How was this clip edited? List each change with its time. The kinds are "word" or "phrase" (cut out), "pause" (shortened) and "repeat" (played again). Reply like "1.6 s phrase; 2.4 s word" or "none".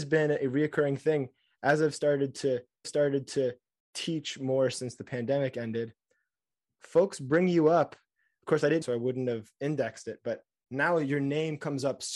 2.8 s repeat; 8.8 s phrase